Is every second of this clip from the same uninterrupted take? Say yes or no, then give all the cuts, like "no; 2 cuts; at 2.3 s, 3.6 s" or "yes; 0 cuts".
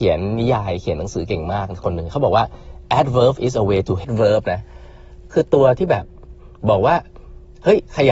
no; 2 cuts; at 4.0 s, 5.3 s